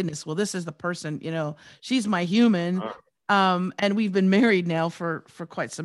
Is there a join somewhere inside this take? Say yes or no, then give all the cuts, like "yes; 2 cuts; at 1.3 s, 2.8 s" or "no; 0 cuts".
no; 0 cuts